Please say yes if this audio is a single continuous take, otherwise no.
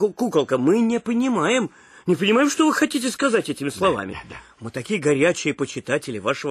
yes